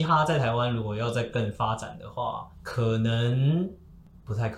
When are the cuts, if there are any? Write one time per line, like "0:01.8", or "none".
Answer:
0:02.5